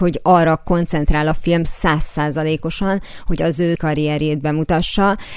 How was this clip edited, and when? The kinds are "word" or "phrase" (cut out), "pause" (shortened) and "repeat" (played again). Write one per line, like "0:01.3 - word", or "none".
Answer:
0:03.8 - word